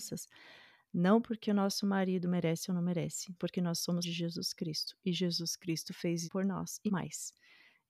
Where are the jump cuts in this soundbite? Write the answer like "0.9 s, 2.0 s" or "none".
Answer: 3.4 s, 4.0 s, 6.2 s, 6.9 s